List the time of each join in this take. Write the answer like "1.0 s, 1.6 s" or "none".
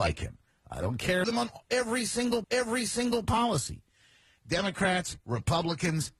1.2 s, 2.4 s